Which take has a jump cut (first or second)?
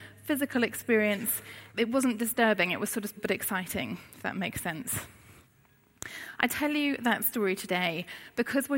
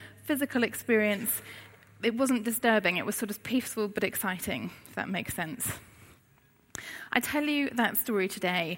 first